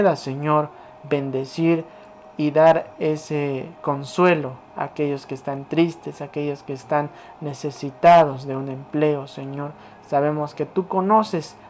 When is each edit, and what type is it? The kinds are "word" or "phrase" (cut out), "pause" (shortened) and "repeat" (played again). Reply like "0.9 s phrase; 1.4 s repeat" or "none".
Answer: none